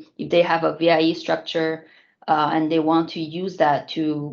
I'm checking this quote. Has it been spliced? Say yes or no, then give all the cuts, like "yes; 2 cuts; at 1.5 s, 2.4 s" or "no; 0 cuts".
no; 0 cuts